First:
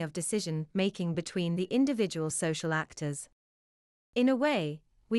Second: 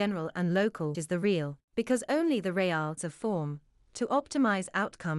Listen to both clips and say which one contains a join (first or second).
second